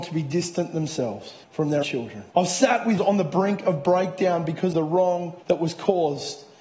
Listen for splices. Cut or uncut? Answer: cut